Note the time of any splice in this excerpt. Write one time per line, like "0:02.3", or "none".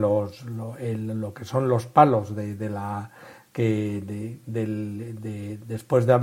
none